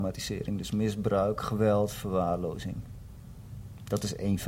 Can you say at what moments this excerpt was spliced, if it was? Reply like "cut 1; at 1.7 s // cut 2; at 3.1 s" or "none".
none